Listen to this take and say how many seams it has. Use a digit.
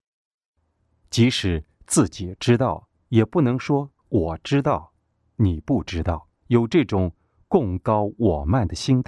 3